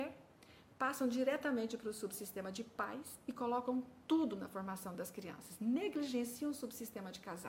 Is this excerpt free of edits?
yes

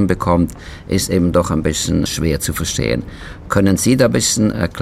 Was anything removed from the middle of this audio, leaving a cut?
yes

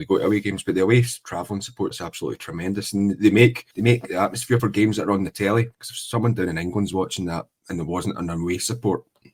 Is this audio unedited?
no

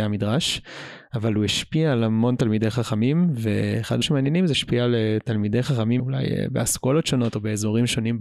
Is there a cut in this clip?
yes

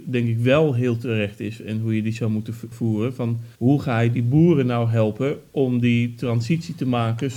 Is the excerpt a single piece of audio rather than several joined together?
no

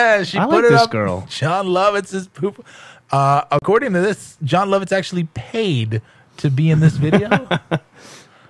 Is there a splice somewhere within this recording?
no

